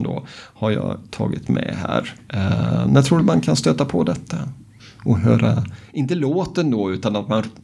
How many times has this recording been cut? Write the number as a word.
zero